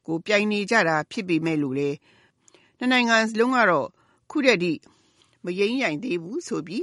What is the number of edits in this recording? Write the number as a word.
zero